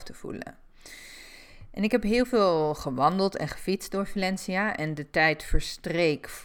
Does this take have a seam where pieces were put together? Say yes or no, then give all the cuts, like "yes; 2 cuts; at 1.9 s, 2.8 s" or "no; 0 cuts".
no; 0 cuts